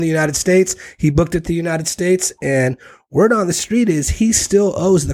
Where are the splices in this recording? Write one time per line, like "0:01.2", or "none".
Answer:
none